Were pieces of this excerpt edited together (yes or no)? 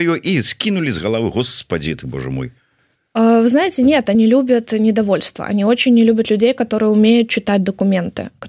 yes